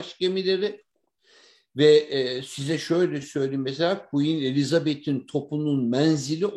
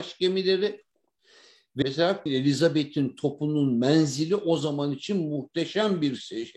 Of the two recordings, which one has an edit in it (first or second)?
second